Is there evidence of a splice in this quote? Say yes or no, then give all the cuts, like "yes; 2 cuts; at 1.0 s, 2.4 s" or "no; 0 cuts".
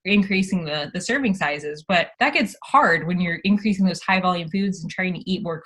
yes; 1 cut; at 2.1 s